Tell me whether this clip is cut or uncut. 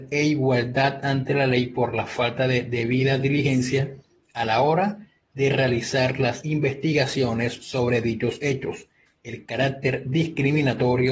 uncut